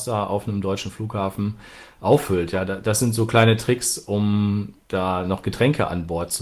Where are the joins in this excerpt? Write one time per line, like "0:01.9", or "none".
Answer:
0:04.8